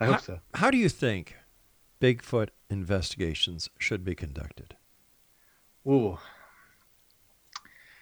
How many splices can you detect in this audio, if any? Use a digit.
0